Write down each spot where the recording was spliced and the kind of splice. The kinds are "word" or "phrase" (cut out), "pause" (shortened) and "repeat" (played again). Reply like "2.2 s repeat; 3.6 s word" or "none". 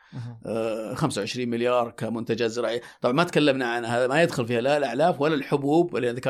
none